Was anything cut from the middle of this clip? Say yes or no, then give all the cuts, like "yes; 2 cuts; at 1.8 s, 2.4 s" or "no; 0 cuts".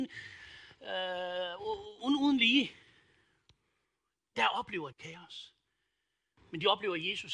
yes; 2 cuts; at 2.0 s, 4.9 s